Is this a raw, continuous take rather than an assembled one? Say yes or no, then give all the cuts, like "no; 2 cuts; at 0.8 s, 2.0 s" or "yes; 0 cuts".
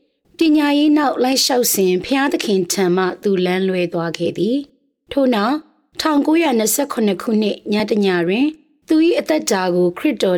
yes; 0 cuts